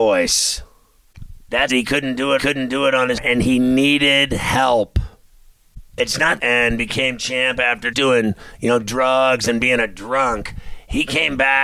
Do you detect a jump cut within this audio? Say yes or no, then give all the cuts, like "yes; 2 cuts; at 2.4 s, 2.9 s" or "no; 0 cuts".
yes; 5 cuts; at 1.7 s, 2.4 s, 3.2 s, 6.4 s, 7.9 s